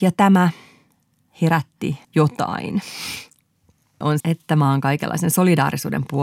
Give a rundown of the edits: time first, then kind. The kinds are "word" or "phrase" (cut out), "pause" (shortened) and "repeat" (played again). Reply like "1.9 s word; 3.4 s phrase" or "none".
2.0 s pause; 4.2 s word